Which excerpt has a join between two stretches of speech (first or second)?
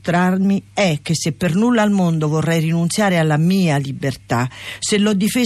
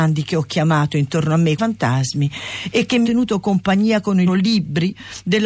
second